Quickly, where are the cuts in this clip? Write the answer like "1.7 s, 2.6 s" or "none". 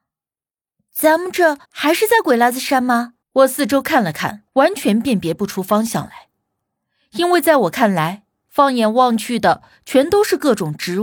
1.6 s, 3.2 s, 4.5 s